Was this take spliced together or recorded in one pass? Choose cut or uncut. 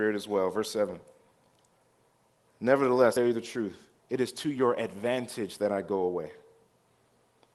cut